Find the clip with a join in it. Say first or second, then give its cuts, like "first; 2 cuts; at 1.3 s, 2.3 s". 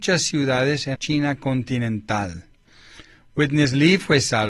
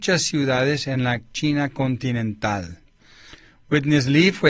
first; 1 cut; at 0.9 s